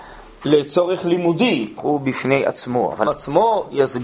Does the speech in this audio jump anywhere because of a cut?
yes; 2 cuts; at 1.8 s, 3.0 s

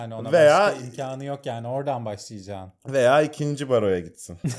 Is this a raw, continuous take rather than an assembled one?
yes; 0 cuts

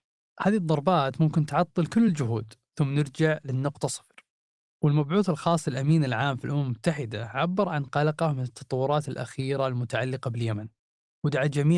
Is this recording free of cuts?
yes; 0 cuts

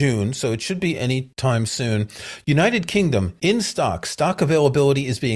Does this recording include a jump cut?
no; 0 cuts

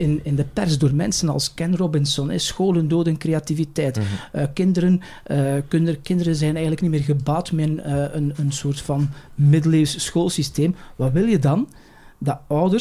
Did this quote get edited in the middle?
no; 0 cuts

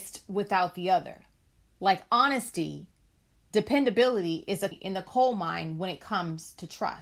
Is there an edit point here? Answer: yes; 1 cut; at 4.7 s

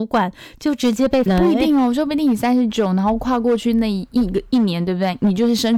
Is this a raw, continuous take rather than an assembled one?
no; 1 cut; at 1.3 s

